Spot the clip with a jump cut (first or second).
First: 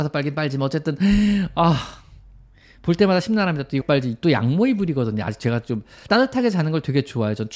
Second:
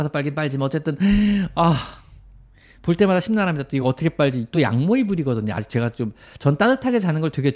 first